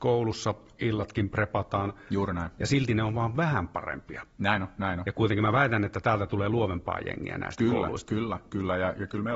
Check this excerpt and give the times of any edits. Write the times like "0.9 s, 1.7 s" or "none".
none